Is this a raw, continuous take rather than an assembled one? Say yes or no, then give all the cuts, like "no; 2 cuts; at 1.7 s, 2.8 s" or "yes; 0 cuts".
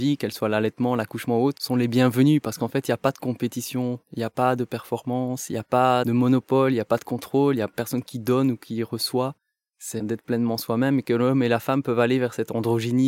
yes; 0 cuts